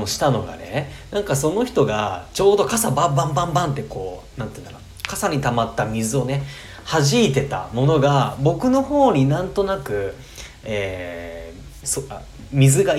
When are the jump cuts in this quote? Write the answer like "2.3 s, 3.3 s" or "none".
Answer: 11.8 s